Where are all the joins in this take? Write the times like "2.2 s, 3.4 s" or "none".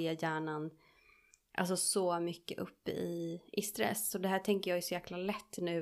none